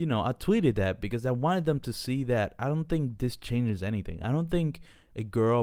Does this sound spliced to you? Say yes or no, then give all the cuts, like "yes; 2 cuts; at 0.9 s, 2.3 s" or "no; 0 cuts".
no; 0 cuts